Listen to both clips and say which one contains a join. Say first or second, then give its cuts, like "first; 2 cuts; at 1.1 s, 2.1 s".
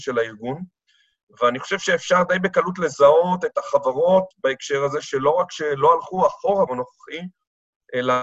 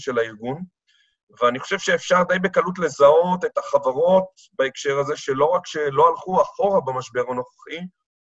first; 2 cuts; at 4.3 s, 6.7 s